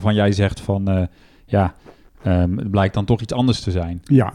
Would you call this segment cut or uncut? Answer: uncut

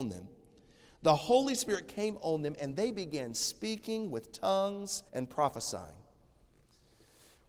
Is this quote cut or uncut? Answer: cut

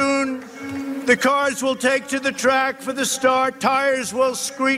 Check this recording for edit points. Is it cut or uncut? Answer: uncut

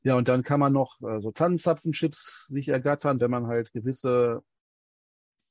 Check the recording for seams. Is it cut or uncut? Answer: uncut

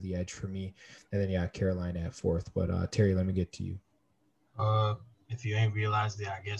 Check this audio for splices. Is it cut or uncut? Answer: uncut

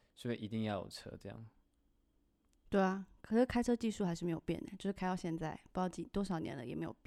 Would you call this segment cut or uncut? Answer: uncut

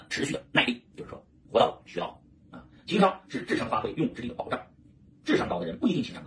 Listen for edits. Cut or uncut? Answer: uncut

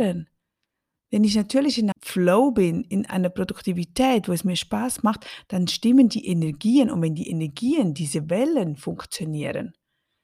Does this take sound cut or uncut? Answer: cut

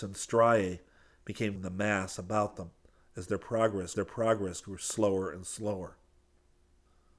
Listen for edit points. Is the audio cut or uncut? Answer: cut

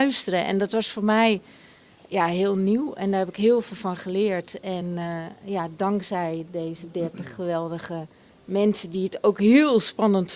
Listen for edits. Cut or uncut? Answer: uncut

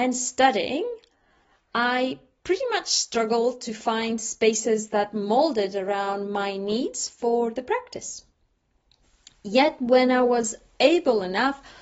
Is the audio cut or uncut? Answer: uncut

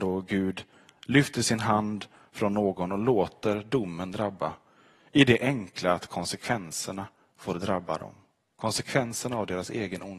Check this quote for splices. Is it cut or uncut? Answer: uncut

